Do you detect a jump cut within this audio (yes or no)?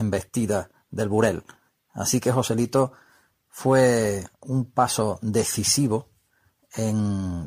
no